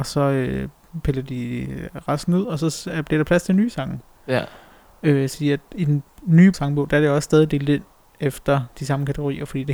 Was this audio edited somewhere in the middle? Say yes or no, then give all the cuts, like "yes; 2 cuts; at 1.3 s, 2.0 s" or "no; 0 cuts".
yes; 2 cuts; at 5.3 s, 6.5 s